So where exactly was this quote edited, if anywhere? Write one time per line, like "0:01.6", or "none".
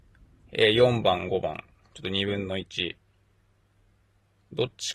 none